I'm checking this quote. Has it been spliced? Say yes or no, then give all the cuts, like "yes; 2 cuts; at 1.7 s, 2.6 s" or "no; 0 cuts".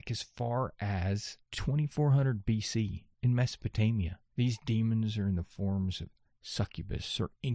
yes; 2 cuts; at 1.4 s, 4.2 s